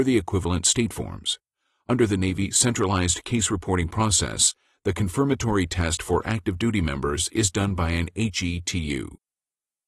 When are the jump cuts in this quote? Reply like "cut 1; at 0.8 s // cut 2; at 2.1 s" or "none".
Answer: none